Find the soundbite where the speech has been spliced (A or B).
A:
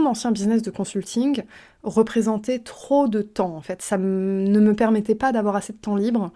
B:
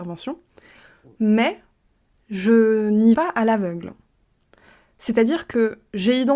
B